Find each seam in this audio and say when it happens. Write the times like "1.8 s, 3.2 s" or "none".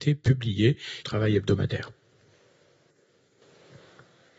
1.0 s